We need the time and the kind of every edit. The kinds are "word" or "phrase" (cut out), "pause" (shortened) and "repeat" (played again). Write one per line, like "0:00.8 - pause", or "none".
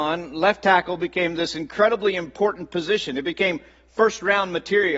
none